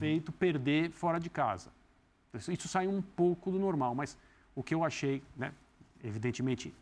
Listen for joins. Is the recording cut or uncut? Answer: uncut